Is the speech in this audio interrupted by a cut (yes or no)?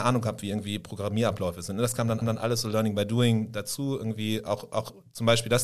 yes